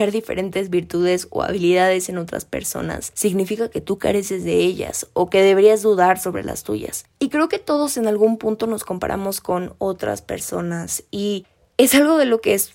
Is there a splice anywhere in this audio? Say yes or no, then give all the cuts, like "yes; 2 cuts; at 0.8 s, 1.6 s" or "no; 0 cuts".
no; 0 cuts